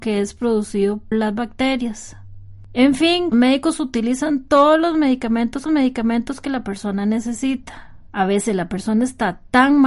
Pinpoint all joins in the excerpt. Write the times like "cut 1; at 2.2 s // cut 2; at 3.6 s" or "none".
cut 1; at 1.1 s // cut 2; at 3.3 s // cut 3; at 5.7 s // cut 4; at 8.1 s